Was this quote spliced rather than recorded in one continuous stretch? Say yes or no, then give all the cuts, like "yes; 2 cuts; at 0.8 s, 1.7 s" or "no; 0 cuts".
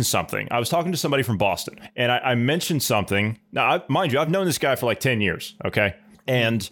no; 0 cuts